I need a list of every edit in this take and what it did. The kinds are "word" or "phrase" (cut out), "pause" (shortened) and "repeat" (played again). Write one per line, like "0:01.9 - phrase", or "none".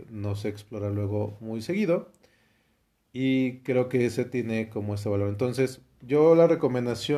none